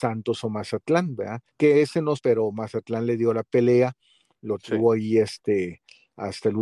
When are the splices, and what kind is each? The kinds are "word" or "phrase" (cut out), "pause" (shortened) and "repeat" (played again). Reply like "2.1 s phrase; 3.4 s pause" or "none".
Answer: 1.5 s pause; 2.2 s phrase

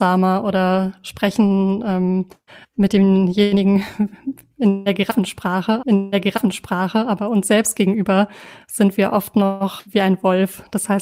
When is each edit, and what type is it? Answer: 2.5 s pause; 5.8 s repeat; 9.9 s word

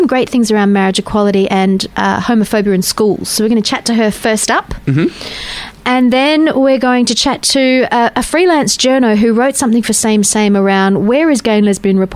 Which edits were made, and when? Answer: none

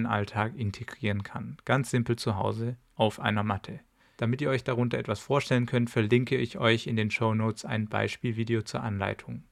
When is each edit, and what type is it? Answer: none

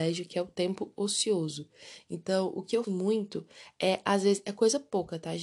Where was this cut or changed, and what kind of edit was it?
2.8 s word

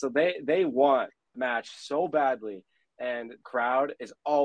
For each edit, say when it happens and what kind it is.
1.3 s word; 3.4 s word

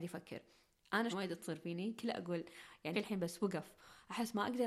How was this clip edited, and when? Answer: 1.1 s word; 2.9 s word

